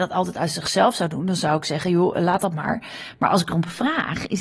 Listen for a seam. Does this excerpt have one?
no; 0 cuts

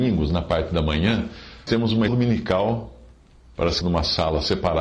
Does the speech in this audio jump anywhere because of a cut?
yes; 3 cuts; at 1.7 s, 2.1 s, 3.8 s

